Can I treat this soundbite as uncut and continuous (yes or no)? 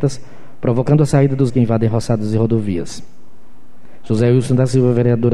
no